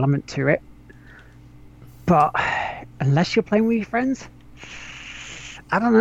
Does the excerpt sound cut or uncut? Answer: uncut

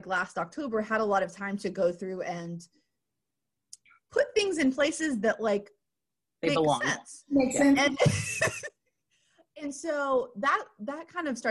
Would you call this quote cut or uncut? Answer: uncut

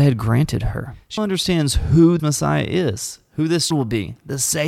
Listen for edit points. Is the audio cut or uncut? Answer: cut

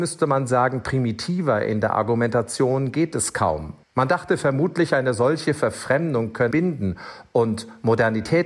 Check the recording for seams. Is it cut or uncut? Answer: cut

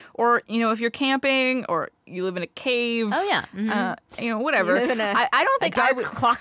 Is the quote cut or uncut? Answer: uncut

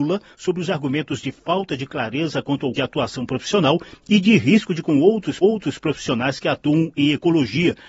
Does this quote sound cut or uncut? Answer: cut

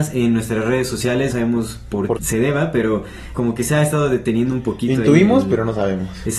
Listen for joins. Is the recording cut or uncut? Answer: cut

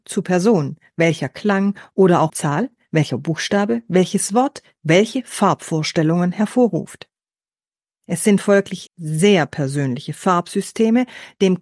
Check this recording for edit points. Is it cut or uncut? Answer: cut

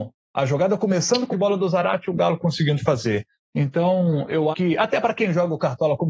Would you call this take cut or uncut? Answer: cut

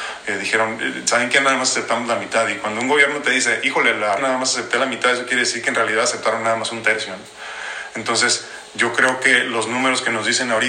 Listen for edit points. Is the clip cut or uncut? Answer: cut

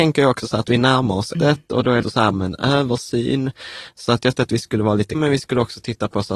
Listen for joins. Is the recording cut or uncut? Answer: cut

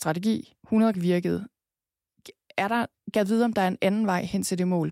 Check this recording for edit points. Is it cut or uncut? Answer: cut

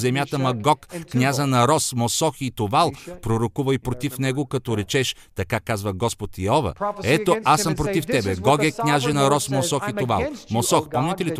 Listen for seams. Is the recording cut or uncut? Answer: uncut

